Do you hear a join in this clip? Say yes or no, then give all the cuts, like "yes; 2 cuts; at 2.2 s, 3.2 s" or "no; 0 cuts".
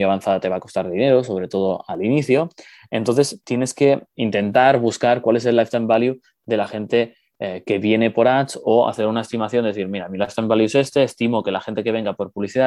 no; 0 cuts